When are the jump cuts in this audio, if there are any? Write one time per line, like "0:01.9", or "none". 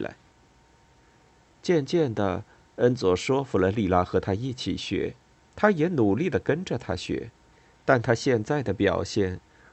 0:05.4
0:07.5